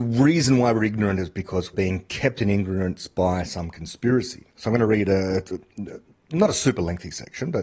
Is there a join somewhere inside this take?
yes; 1 cut; at 1.7 s

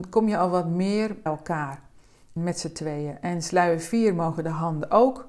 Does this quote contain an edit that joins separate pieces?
yes; 2 cuts; at 1.3 s, 2.4 s

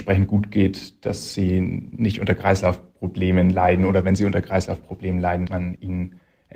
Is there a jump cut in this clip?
yes; 1 cut; at 5.5 s

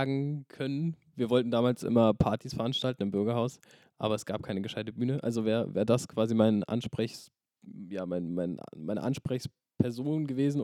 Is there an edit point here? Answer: no; 0 cuts

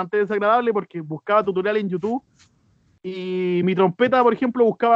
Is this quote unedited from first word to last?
yes; 0 cuts

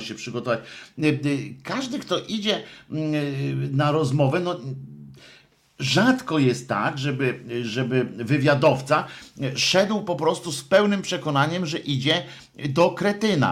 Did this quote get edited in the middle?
no; 0 cuts

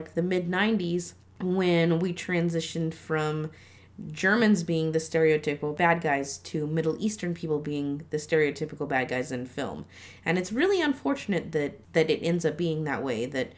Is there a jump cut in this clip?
no; 0 cuts

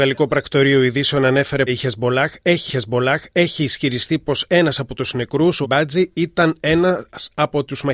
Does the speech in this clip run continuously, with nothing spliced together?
no; 3 cuts; at 1.7 s, 2.7 s, 5.6 s

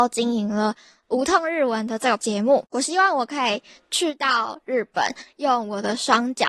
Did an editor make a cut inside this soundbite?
yes; 1 cut; at 2.2 s

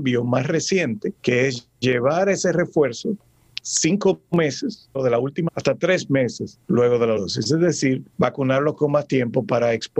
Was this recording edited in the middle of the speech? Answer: yes; 7 cuts; at 1.2 s, 3.6 s, 4.9 s, 5.5 s, 6.6 s, 7.2 s, 8.1 s

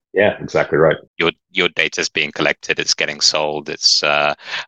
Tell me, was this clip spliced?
yes; 1 cut; at 1.1 s

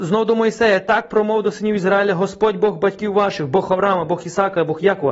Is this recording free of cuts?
yes; 0 cuts

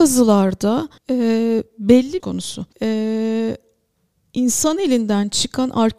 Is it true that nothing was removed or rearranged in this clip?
no; 3 cuts; at 1.0 s, 2.2 s, 2.7 s

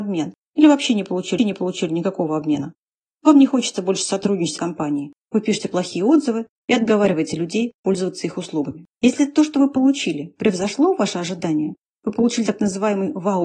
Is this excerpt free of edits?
no; 3 cuts; at 1.4 s, 4.6 s, 8.9 s

